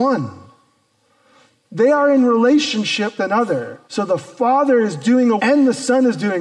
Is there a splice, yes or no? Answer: yes